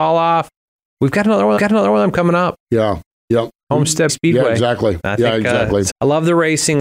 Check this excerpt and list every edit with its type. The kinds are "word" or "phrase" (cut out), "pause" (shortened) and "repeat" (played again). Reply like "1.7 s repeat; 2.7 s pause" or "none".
1.6 s repeat; 2.6 s pause; 4.1 s word; 5.9 s word